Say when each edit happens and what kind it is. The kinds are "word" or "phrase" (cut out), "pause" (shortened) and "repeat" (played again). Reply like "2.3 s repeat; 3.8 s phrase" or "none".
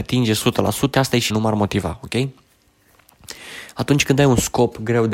0.9 s word; 1.3 s word